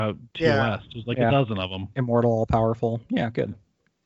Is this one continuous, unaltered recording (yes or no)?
yes